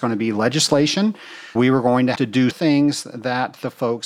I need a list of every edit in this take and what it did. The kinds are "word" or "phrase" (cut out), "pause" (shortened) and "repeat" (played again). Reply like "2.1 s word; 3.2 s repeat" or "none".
1.6 s word; 2.2 s word; 2.5 s word